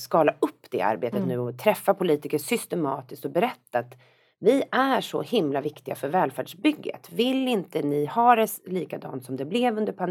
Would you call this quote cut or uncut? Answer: uncut